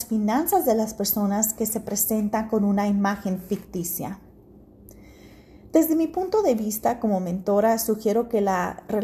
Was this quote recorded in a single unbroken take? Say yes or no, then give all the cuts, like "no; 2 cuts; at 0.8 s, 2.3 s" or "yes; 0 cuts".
yes; 0 cuts